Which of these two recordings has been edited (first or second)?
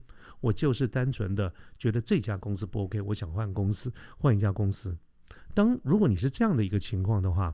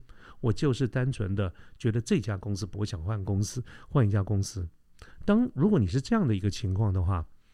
second